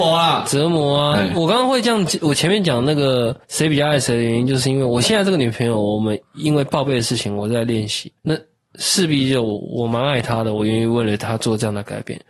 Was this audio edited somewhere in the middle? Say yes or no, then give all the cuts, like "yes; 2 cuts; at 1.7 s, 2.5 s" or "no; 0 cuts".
yes; 2 cuts; at 3.4 s, 8.2 s